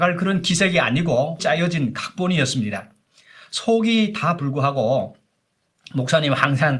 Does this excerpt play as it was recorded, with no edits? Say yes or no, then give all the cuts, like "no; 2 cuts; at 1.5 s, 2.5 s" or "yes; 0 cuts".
no; 2 cuts; at 1.4 s, 4.4 s